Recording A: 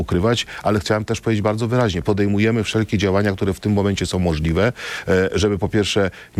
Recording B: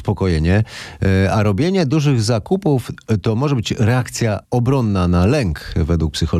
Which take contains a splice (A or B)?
B